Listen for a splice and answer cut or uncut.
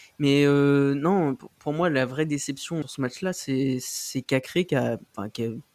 cut